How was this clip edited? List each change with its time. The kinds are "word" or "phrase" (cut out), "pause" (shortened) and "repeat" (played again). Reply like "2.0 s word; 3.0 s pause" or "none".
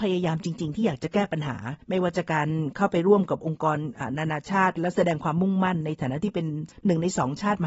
1.8 s pause